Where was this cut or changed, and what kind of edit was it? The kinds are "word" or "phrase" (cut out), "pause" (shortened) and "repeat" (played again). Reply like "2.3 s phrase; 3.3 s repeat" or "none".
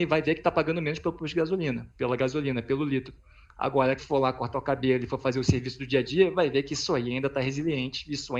4.0 s word